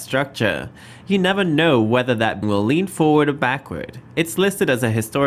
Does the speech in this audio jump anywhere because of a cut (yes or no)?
yes